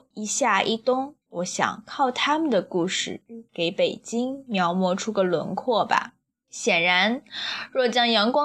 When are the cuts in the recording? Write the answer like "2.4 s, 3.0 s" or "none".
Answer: 1.2 s, 6.3 s